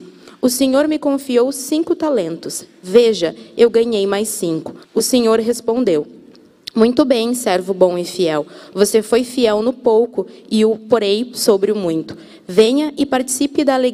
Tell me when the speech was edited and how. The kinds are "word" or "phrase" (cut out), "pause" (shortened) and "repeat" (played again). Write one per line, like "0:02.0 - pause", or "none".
0:04.8 - pause